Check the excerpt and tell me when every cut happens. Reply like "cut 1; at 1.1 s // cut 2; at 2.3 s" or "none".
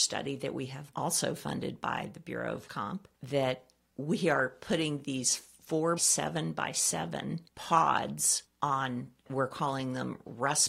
cut 1; at 0.9 s // cut 2; at 2.7 s // cut 3; at 3.1 s // cut 4; at 6.0 s // cut 5; at 7.5 s // cut 6; at 9.2 s